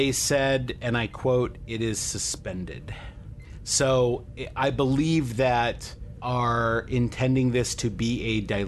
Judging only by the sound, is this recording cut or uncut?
cut